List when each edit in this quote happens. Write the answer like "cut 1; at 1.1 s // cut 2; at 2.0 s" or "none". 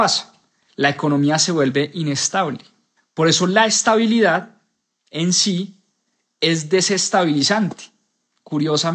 none